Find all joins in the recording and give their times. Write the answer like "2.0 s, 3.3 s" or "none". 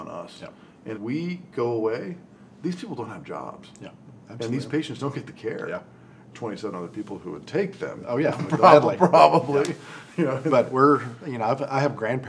0.9 s, 6.3 s